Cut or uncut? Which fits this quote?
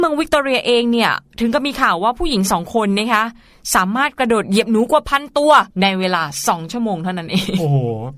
cut